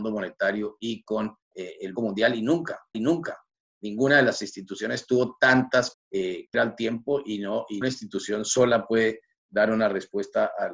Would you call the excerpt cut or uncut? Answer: cut